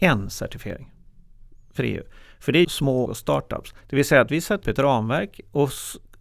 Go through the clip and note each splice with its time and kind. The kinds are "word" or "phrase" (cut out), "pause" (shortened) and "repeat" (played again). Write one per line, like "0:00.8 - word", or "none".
0:02.6 - word
0:03.1 - phrase
0:03.8 - pause
0:04.6 - word